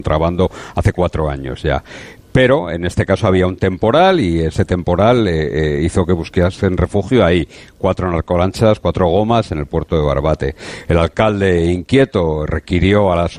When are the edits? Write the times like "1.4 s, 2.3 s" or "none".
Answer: none